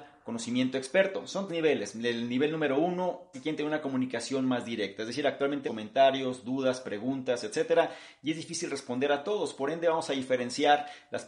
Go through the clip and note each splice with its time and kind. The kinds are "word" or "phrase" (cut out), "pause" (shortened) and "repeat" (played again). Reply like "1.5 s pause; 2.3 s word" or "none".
1.5 s word; 3.3 s phrase; 5.7 s phrase